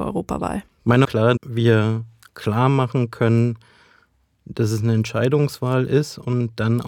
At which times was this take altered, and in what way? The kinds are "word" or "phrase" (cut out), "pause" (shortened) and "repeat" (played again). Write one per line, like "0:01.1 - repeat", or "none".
0:01.0 - phrase
0:01.4 - word